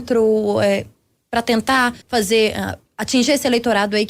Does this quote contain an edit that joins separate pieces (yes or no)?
yes